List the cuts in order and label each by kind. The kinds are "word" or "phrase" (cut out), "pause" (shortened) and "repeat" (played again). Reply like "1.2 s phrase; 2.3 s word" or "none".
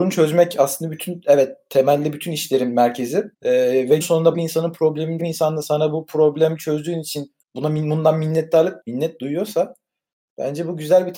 3.3 s pause; 4.0 s word; 4.3 s word; 5.2 s phrase; 7.4 s pause; 8.8 s word